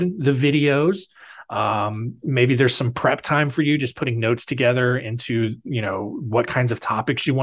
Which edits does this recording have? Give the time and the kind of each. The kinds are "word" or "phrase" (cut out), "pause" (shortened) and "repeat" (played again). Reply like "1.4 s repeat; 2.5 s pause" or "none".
none